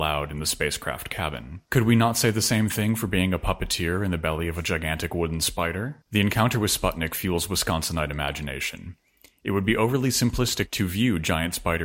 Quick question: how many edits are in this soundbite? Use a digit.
2